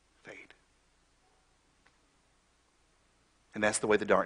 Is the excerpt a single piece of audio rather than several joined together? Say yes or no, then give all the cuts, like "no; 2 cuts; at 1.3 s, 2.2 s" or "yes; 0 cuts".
yes; 0 cuts